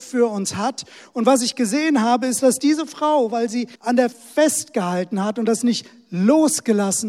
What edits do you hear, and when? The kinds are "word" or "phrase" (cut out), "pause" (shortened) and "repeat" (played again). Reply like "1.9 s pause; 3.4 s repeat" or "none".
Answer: 3.7 s pause; 4.1 s word